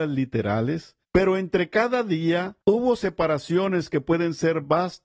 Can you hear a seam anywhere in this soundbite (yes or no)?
yes